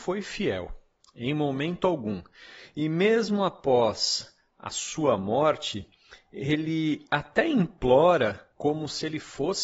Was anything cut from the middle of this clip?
yes; 1 cut; at 8.5 s

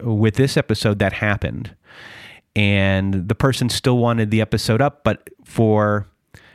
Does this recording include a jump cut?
no; 0 cuts

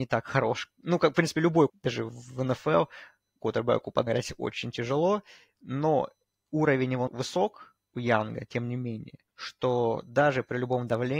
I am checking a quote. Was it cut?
yes; 5 cuts; at 1.7 s, 3.4 s, 4.1 s, 7.1 s, 9.3 s

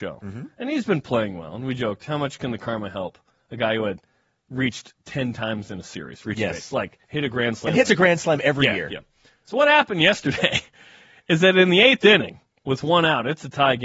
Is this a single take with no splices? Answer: yes; 0 cuts

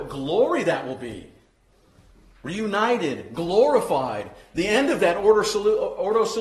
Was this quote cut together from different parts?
no; 0 cuts

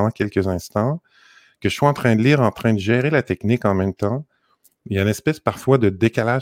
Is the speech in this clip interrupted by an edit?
no; 0 cuts

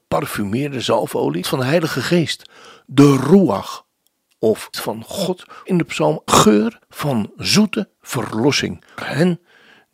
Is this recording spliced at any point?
yes; 6 cuts; at 1.4 s, 4.7 s, 5.7 s, 6.3 s, 6.8 s, 9.0 s

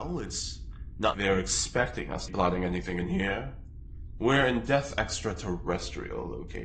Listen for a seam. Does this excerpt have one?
yes; 3 cuts; at 1.1 s, 2.3 s, 4.9 s

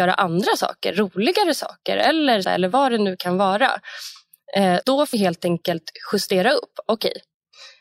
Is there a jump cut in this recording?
yes; 3 cuts; at 2.4 s, 4.8 s, 5.1 s

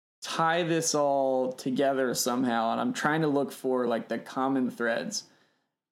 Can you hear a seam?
no; 0 cuts

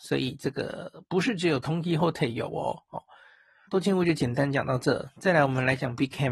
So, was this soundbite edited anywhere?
yes; 2 cuts; at 2.0 s, 3.7 s

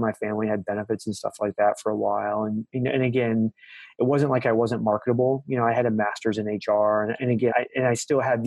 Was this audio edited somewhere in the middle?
yes; 1 cut; at 7.5 s

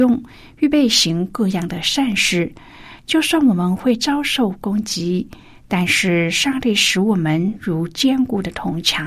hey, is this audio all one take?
yes; 0 cuts

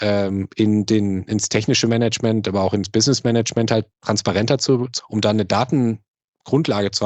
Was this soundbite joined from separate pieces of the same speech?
yes; 1 cut; at 5.0 s

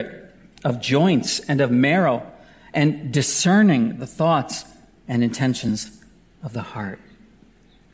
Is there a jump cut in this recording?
no; 0 cuts

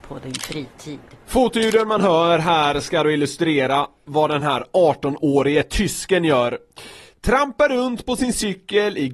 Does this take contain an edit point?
no; 0 cuts

